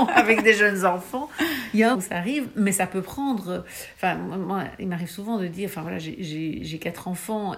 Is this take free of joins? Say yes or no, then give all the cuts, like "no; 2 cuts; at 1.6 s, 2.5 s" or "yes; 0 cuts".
no; 1 cut; at 1.9 s